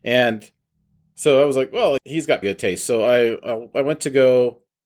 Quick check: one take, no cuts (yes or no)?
no